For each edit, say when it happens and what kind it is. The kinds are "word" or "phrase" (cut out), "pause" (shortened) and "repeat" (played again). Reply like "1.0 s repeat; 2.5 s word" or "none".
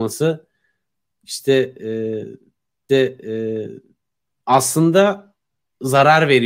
2.9 s repeat